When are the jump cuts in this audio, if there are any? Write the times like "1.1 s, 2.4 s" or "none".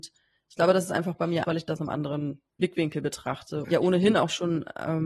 1.4 s, 1.8 s, 3.6 s